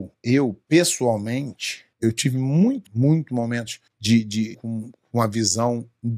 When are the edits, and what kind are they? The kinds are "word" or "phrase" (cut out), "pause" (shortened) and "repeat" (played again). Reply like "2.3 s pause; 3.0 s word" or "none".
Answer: 1.9 s pause; 2.9 s phrase; 3.9 s pause; 4.5 s phrase